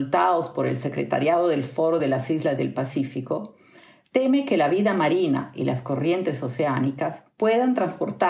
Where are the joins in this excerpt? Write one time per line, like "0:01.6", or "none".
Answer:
none